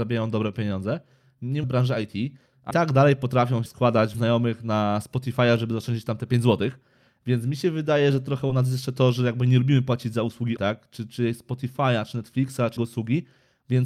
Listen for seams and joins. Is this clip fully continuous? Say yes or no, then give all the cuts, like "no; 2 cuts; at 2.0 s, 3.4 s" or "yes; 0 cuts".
no; 6 cuts; at 1.6 s, 2.7 s, 3.7 s, 4.1 s, 10.6 s, 12.8 s